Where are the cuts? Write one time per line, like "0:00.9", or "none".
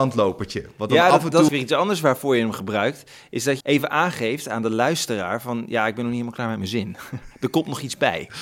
0:01.5
0:03.6